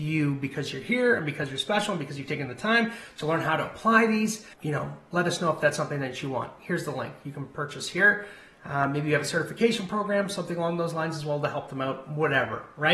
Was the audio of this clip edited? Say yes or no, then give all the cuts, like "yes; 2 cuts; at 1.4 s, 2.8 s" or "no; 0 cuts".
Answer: yes; 1 cut; at 4.5 s